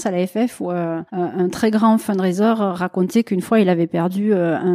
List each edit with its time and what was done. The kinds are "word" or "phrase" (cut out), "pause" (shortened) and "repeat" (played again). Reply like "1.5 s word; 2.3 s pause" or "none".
1.1 s pause